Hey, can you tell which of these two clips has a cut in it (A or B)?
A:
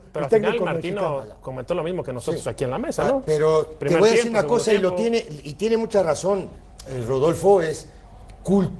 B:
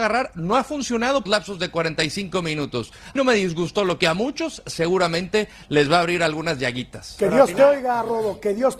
B